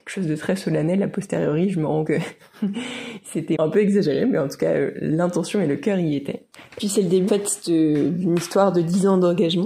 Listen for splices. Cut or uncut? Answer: cut